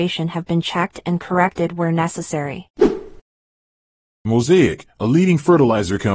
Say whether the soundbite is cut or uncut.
uncut